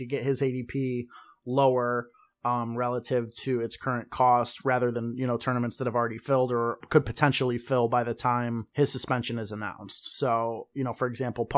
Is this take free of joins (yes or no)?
yes